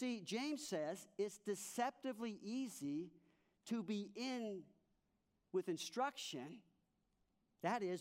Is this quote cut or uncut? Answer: uncut